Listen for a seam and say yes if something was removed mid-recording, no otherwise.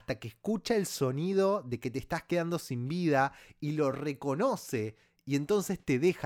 no